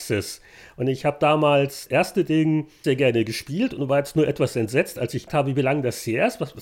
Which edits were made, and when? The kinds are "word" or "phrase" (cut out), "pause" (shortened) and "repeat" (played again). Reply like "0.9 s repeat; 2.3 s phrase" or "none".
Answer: 1.9 s word; 2.8 s word; 5.3 s word

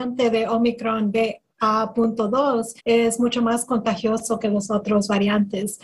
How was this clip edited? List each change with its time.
2.8 s pause

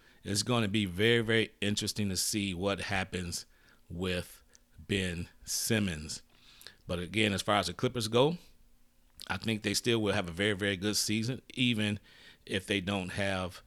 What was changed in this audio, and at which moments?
none

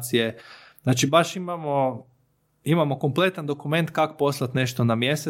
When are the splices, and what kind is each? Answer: none

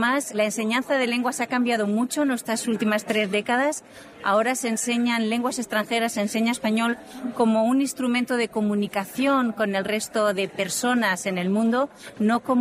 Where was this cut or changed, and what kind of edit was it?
none

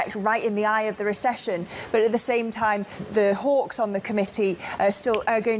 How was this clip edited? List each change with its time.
3.0 s word

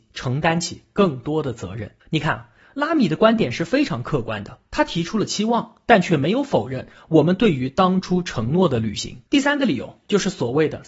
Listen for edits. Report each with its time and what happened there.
2.0 s pause; 9.3 s pause

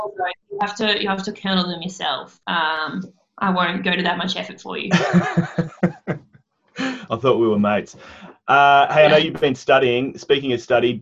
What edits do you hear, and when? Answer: 2.4 s pause

